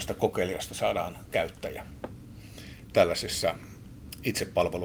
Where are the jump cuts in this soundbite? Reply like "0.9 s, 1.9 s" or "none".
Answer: 1.3 s, 2.9 s